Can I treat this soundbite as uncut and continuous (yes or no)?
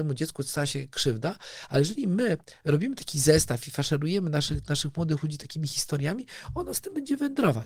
yes